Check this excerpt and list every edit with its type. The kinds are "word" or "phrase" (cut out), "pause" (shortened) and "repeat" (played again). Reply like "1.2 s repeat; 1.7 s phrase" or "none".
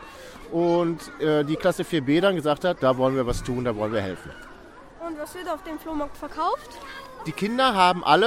none